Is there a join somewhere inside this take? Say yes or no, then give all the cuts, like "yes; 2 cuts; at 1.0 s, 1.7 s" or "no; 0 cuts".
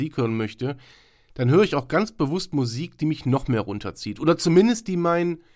no; 0 cuts